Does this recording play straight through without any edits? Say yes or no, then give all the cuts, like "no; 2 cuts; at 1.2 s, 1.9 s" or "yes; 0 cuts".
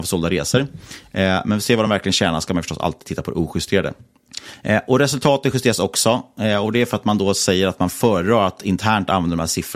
yes; 0 cuts